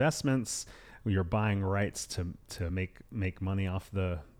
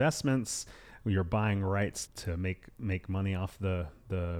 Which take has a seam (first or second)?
second